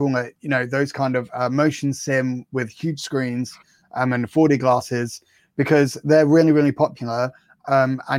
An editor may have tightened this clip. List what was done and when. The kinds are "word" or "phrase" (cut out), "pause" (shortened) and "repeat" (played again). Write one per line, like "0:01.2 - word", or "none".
none